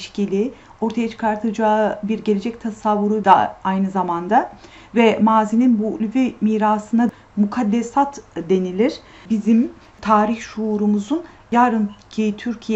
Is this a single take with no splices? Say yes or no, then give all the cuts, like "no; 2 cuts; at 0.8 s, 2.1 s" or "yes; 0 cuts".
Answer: yes; 0 cuts